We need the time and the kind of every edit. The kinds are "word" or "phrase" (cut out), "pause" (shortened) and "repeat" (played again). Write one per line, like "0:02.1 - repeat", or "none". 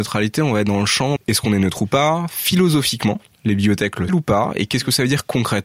0:01.2 - word
0:04.1 - word

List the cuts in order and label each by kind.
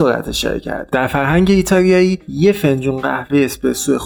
none

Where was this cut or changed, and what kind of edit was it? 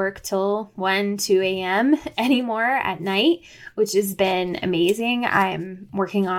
none

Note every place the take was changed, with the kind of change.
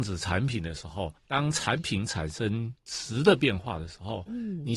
0:01.2 - pause
0:02.8 - pause

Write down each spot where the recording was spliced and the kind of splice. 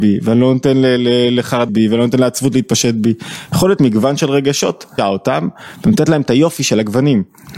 0:01.7 - word
0:03.8 - word
0:05.0 - word

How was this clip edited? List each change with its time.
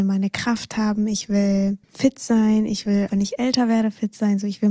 0:01.8 - pause
0:03.1 - word

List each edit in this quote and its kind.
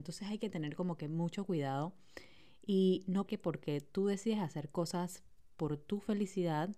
0:03.3 - word

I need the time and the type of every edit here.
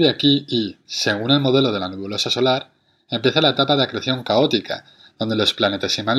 none

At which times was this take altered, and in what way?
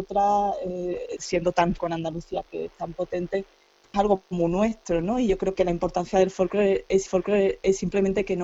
0:01.2 - phrase
0:01.8 - word
0:02.5 - word
0:03.9 - phrase
0:05.5 - word
0:07.1 - repeat

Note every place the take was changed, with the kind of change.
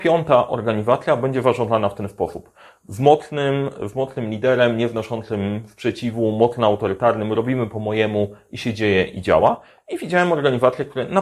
none

